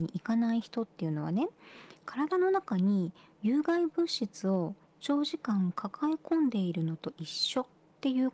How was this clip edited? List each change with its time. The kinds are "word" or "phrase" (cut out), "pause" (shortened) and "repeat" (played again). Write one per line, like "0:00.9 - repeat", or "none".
none